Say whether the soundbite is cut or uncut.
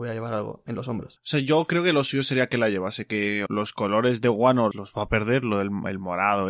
cut